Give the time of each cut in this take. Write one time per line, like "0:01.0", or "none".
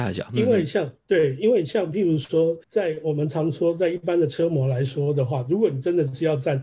0:02.6